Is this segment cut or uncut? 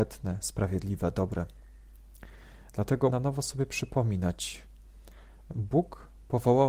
cut